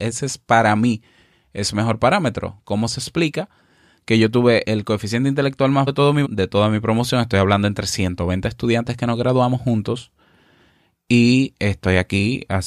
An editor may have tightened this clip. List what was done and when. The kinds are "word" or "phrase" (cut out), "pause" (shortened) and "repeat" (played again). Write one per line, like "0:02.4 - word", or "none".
0:04.6 - word
0:05.9 - word
0:06.2 - word

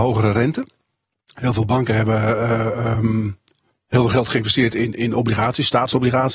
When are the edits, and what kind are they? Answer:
none

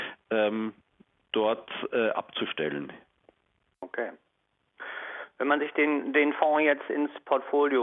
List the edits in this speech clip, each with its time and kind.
none

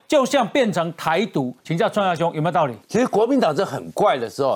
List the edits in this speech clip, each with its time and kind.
0:01.6 - pause
0:02.8 - pause

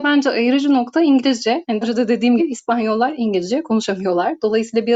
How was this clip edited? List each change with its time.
0:01.8 - word
0:02.4 - word

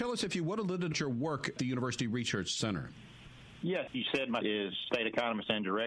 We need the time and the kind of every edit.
0:00.9 - word
0:01.6 - word
0:03.9 - word
0:04.4 - word
0:04.9 - word

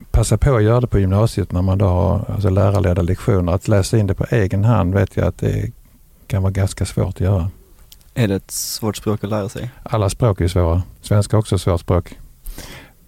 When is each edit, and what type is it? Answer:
none

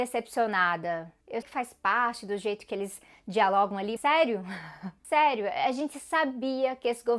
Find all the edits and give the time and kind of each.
0:01.4 - word
0:04.0 - word

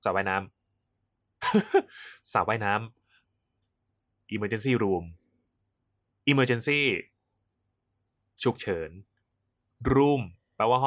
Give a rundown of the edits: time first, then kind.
none

